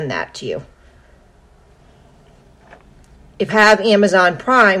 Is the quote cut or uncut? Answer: cut